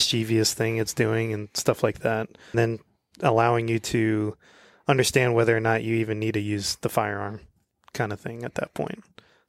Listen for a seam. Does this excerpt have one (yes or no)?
yes